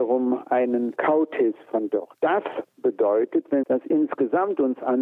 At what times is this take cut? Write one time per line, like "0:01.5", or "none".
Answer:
0:03.6